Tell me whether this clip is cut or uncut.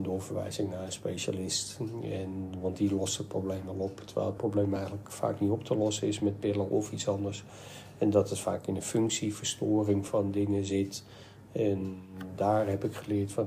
uncut